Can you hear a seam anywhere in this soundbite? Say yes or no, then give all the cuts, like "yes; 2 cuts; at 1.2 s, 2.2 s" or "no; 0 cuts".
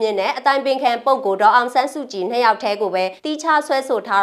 yes; 1 cut; at 3.2 s